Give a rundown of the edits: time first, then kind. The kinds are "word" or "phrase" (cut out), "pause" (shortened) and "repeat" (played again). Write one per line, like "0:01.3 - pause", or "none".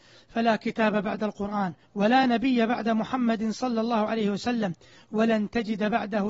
none